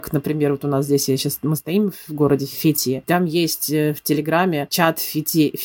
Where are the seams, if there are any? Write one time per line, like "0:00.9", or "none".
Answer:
none